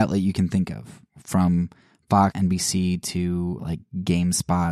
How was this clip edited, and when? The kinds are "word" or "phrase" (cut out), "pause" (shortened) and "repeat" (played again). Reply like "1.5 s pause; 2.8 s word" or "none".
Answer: 2.3 s word; 3.6 s word